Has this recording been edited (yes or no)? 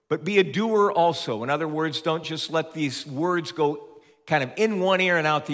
no